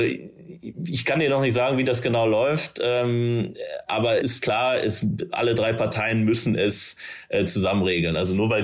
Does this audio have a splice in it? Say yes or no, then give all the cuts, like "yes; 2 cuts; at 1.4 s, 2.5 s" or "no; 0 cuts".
yes; 1 cut; at 4.2 s